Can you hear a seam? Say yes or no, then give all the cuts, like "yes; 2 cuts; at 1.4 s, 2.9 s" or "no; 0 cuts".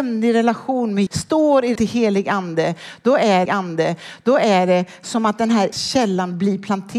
yes; 4 cuts; at 1.1 s, 1.8 s, 3.5 s, 5.7 s